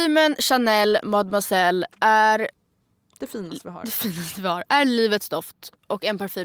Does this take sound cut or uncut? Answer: uncut